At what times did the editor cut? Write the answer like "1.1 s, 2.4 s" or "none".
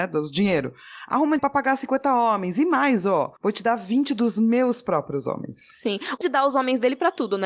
1.4 s, 3.4 s, 6.2 s